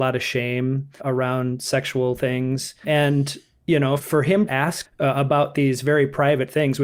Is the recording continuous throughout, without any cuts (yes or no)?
no